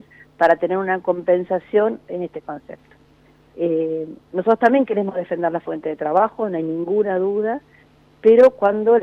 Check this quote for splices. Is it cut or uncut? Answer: uncut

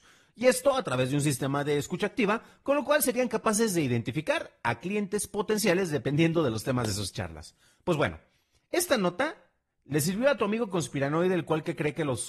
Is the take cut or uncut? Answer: uncut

